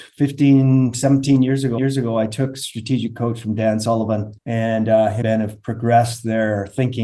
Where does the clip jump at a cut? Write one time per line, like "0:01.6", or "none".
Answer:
0:01.8
0:04.4
0:05.2